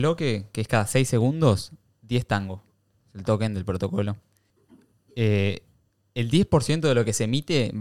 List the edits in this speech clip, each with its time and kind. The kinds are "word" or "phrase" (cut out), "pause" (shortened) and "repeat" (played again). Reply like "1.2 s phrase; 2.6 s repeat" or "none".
none

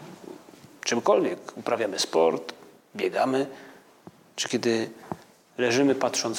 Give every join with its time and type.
none

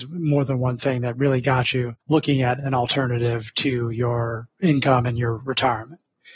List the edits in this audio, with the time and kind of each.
2.0 s pause

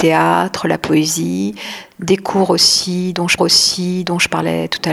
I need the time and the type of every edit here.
3.4 s repeat

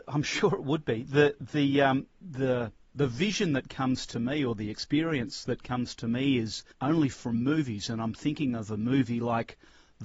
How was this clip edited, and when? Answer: 2.1 s pause; 6.7 s pause

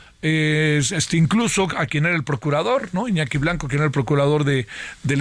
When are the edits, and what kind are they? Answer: none

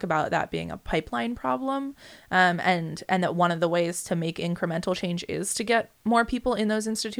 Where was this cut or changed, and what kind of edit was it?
none

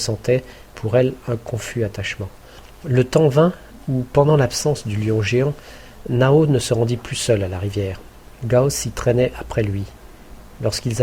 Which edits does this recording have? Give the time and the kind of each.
none

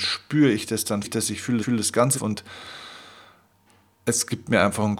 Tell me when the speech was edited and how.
1.0 s word; 1.6 s repeat; 2.1 s word

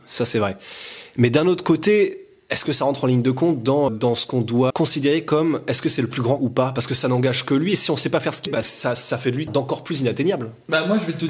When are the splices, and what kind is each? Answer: 3.9 s word; 4.7 s word; 6.4 s word; 8.5 s word; 9.5 s word

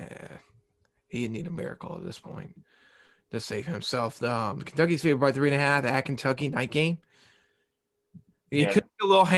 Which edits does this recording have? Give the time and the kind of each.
none

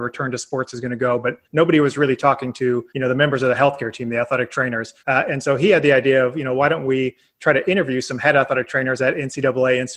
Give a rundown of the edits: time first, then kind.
1.4 s pause; 2.9 s pause; 5.0 s pause

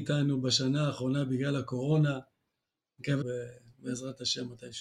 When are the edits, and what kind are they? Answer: 3.2 s word

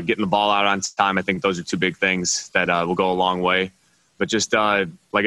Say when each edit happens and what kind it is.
none

